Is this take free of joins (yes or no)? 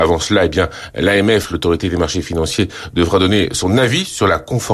yes